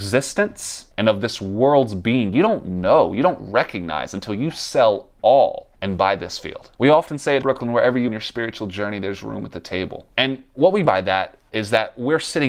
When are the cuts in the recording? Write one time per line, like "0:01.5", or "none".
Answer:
0:00.9
0:05.7
0:06.7
0:07.4
0:08.1
0:10.1
0:10.8